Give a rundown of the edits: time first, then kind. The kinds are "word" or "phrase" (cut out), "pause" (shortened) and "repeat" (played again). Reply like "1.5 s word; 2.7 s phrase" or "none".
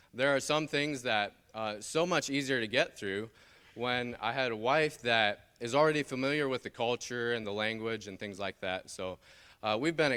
none